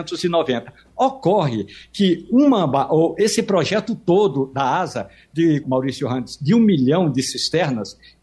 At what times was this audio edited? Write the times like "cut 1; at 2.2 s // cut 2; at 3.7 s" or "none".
cut 1; at 5.6 s